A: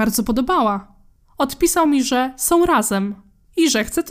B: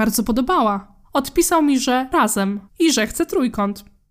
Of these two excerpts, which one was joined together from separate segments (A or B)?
B